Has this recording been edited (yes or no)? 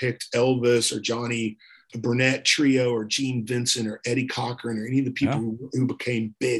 yes